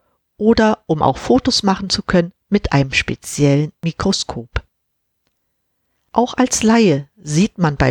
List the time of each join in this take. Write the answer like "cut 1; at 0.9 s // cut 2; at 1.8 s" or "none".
none

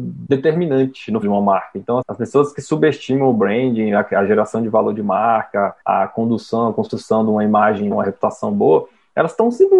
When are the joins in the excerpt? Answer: cut 1; at 1.2 s // cut 2; at 2.0 s // cut 3; at 5.8 s // cut 4; at 7.9 s

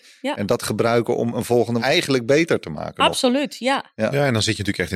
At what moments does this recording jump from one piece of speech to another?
cut 1; at 1.8 s

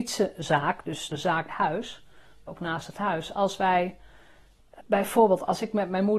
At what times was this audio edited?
cut 1; at 1.1 s // cut 2; at 1.5 s // cut 3; at 2.5 s // cut 4; at 4.8 s

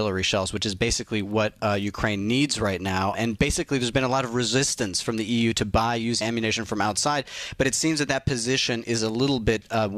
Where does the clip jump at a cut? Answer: cut 1; at 3.1 s // cut 2; at 6.2 s

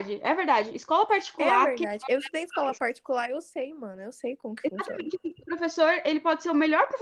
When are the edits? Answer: none

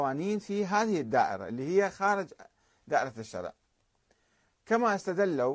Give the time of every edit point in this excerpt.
none

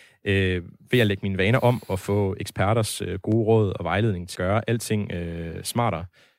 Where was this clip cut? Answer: cut 1; at 4.3 s

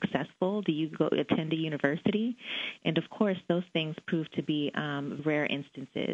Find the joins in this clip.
cut 1; at 5.2 s

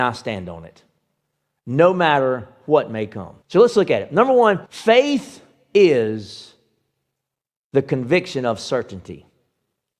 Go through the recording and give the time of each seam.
cut 1; at 3.4 s // cut 2; at 4.7 s

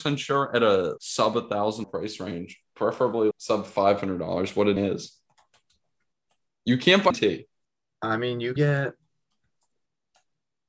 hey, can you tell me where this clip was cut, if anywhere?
cut 1; at 1.0 s // cut 2; at 1.8 s // cut 3; at 3.3 s // cut 4; at 4.8 s // cut 5; at 7.1 s // cut 6; at 8.6 s

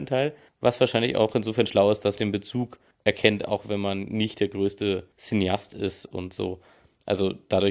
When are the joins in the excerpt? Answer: cut 1; at 2.2 s // cut 2; at 5.1 s

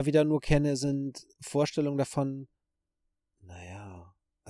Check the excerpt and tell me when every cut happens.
cut 1; at 1.3 s

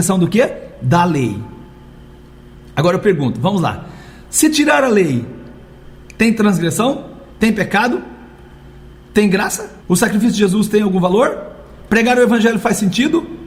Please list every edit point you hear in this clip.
cut 1; at 7.3 s // cut 2; at 9.8 s

